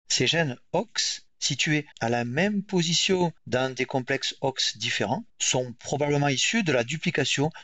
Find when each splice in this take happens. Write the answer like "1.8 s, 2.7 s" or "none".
1.9 s, 3.4 s, 5.3 s